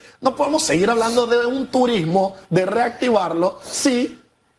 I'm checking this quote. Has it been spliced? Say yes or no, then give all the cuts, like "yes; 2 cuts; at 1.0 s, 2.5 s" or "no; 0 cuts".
no; 0 cuts